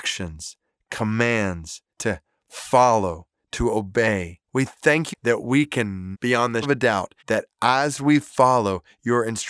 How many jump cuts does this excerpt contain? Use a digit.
6